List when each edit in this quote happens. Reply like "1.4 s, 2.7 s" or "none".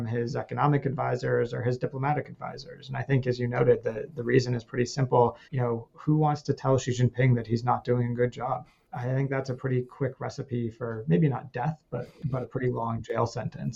5.4 s